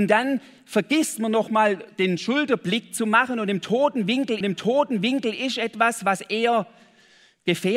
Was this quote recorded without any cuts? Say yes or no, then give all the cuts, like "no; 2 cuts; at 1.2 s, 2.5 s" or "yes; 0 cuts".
no; 1 cut; at 4.4 s